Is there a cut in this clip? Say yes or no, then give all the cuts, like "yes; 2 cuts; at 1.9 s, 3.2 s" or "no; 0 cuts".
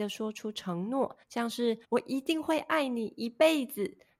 yes; 2 cuts; at 1.2 s, 1.8 s